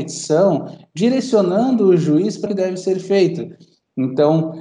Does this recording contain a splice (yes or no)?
yes